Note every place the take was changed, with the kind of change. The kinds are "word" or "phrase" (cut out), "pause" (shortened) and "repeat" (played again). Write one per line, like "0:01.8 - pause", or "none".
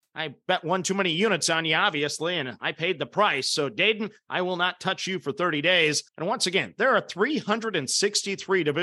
0:06.1 - pause